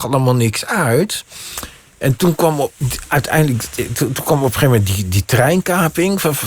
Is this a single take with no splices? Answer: yes; 0 cuts

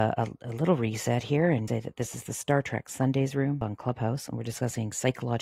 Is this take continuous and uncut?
no; 1 cut; at 1.7 s

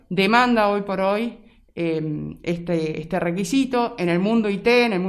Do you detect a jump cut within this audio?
no; 0 cuts

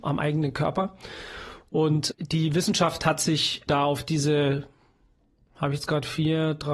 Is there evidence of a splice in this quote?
yes; 2 cuts; at 2.1 s, 3.7 s

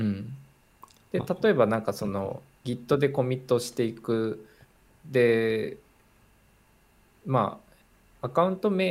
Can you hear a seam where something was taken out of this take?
no; 0 cuts

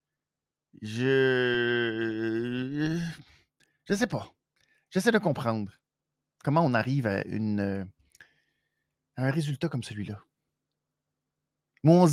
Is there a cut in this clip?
no; 0 cuts

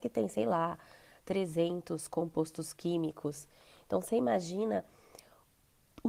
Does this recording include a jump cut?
no; 0 cuts

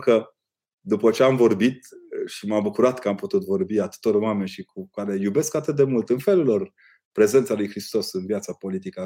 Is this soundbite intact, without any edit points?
yes; 0 cuts

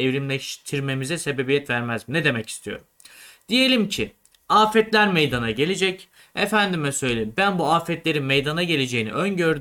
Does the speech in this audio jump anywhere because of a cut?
no; 0 cuts

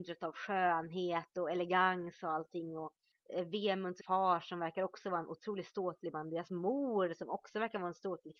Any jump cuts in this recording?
yes; 1 cut; at 4.0 s

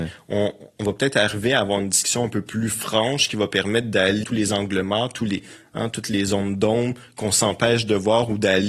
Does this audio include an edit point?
yes; 1 cut; at 4.2 s

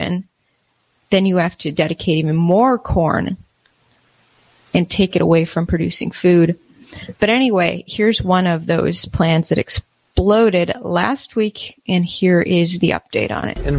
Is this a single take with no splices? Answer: yes; 0 cuts

